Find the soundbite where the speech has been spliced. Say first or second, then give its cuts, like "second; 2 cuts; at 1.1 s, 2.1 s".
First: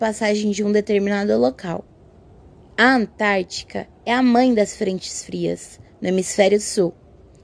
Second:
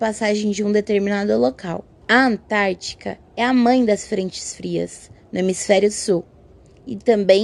second; 1 cut; at 2.0 s